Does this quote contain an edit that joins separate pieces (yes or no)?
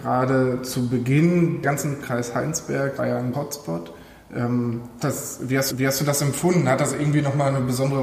yes